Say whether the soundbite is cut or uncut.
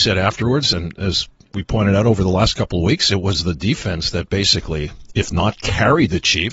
uncut